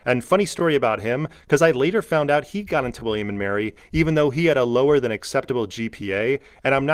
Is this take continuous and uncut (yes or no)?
yes